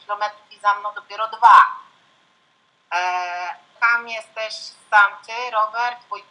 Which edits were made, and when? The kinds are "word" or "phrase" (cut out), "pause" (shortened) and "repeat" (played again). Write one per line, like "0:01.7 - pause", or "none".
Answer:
0:03.8 - word